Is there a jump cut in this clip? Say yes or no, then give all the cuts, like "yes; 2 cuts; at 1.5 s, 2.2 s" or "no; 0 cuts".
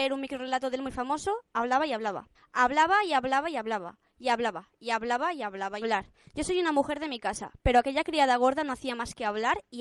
yes; 2 cuts; at 2.3 s, 5.8 s